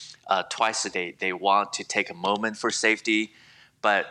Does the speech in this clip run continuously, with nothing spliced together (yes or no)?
no